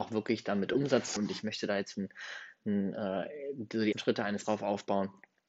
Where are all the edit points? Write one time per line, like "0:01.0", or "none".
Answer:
0:01.2
0:01.9
0:03.9
0:04.4